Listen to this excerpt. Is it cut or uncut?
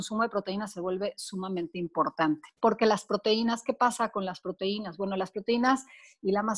cut